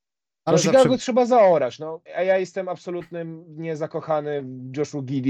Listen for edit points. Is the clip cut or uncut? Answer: cut